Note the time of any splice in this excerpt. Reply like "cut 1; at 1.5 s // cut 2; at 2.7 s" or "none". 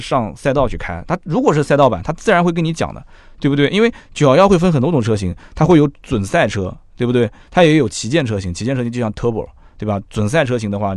none